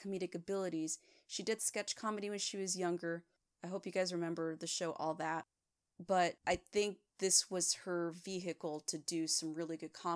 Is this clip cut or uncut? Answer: uncut